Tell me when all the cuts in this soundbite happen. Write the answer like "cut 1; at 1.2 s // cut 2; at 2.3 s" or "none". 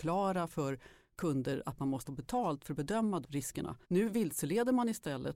cut 1; at 2.1 s // cut 2; at 3.2 s // cut 3; at 3.8 s